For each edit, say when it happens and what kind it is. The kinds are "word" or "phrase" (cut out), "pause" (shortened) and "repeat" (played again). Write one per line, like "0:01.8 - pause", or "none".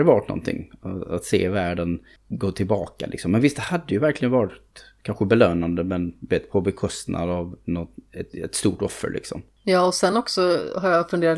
none